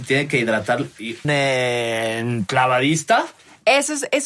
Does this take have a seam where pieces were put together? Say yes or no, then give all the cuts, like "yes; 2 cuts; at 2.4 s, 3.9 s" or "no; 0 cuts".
yes; 1 cut; at 1.2 s